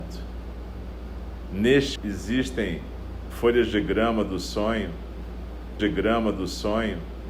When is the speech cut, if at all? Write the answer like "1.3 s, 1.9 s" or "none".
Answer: 2.0 s, 5.8 s